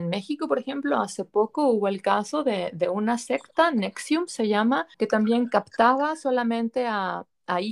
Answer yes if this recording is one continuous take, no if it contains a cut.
no